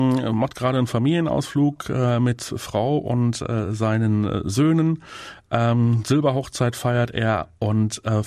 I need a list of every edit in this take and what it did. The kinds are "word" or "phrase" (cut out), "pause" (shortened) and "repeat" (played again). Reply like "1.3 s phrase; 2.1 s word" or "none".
none